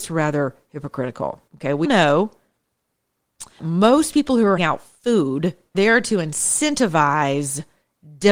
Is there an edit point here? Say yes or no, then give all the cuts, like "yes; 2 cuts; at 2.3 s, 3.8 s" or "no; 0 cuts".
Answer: yes; 5 cuts; at 1.5 s, 1.8 s, 3.6 s, 4.6 s, 5.7 s